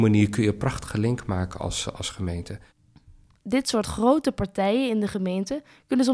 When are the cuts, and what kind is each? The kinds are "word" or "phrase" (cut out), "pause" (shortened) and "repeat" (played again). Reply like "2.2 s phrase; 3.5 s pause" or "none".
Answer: none